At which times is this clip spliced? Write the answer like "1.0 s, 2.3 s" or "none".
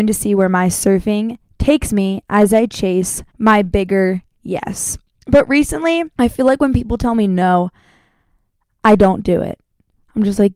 3.3 s, 6.1 s